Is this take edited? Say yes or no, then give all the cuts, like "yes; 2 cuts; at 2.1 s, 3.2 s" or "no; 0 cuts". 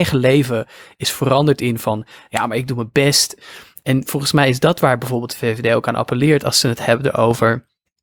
no; 0 cuts